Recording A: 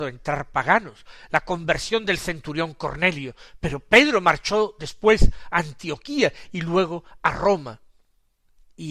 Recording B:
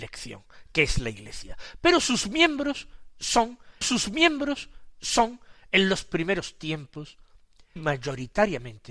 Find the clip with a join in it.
B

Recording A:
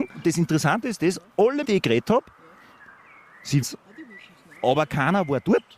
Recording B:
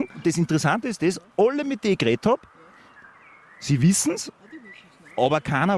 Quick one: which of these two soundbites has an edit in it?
A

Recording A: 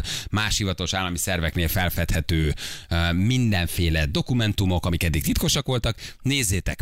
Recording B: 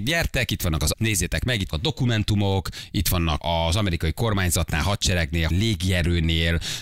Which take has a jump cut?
B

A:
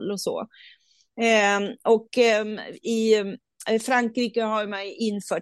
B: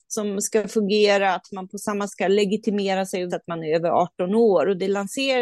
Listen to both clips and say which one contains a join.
B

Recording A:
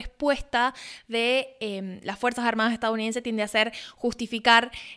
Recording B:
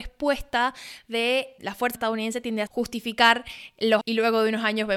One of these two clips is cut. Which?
B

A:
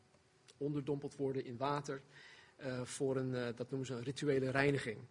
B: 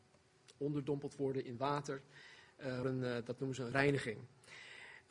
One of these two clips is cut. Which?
B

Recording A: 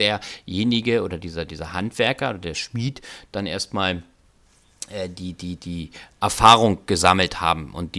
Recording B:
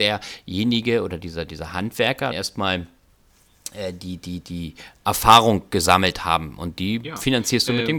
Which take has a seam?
B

